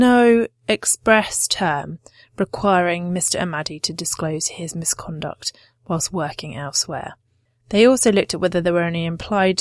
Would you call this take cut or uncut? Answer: uncut